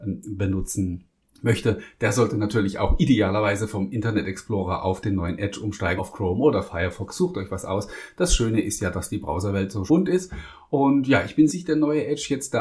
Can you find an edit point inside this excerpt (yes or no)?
yes